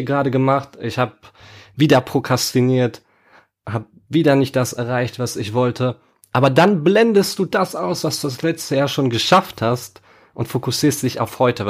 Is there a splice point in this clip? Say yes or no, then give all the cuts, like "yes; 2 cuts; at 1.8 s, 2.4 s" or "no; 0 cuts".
no; 0 cuts